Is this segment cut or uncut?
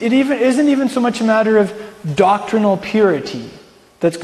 uncut